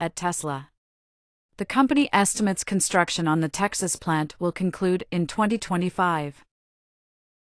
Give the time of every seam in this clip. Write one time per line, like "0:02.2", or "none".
none